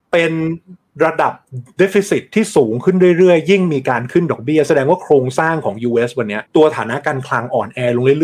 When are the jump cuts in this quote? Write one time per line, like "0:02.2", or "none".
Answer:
0:06.5